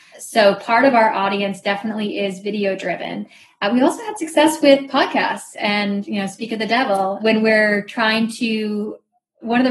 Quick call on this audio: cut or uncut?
uncut